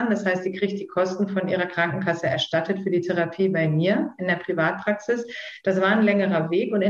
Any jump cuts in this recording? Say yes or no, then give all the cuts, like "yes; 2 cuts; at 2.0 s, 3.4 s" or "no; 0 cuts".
no; 0 cuts